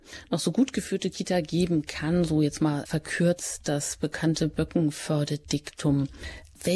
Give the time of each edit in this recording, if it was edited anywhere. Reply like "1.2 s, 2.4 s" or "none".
2.9 s